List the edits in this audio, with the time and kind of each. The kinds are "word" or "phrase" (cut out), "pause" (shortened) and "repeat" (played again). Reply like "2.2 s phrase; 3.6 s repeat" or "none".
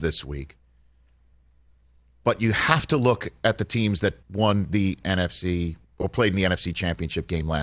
4.2 s pause